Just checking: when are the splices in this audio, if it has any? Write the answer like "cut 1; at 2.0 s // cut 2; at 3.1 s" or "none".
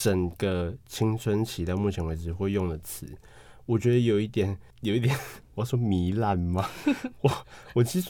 cut 1; at 4.7 s